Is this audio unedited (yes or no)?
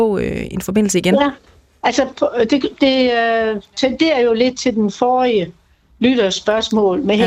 yes